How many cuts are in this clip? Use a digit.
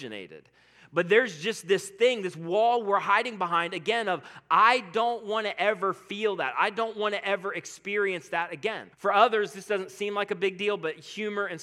1